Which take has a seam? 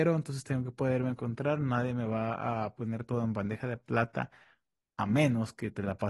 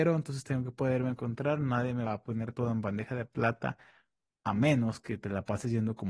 second; 1 cut; at 2.1 s

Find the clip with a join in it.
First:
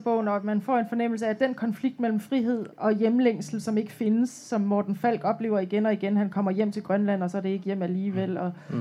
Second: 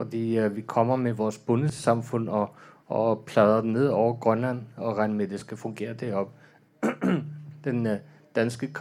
first; 1 cut; at 2.7 s

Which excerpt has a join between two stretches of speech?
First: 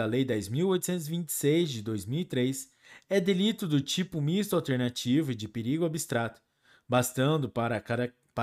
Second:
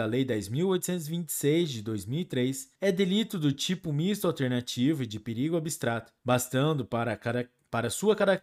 second; 2 cuts; at 2.7 s, 6.2 s

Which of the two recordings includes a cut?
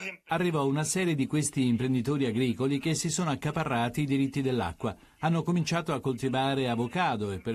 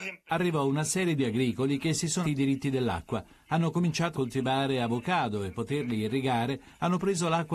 second; 4 cuts; at 1.2 s, 2.2 s, 4.1 s, 5.5 s

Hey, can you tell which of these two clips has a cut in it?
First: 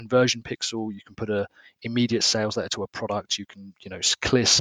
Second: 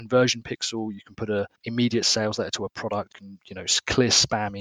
second; 2 cuts; at 1.6 s, 3.1 s

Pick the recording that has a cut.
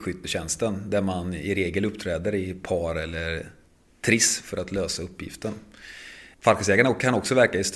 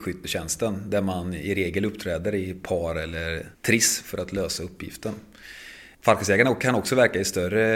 second; 1 cut; at 3.5 s

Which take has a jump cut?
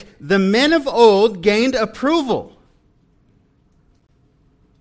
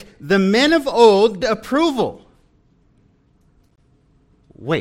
second; 1 cut; at 1.4 s

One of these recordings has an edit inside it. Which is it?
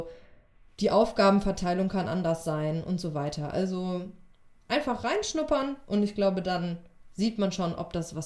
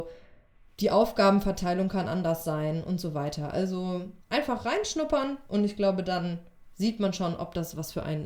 second; 1 cut; at 4.2 s

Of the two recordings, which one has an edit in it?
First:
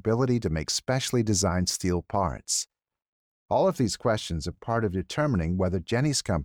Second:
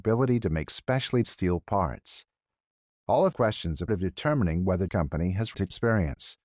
second; 5 cuts; at 1.2 s, 3.3 s, 3.9 s, 4.9 s, 5.5 s

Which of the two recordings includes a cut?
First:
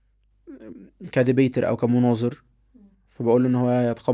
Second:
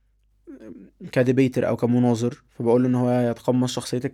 second; 1 cut; at 2.5 s

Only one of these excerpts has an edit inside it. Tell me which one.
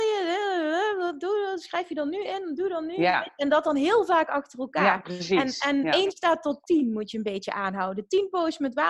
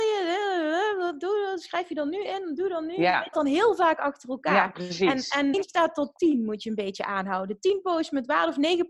second; 2 cuts; at 3.3 s, 5.5 s

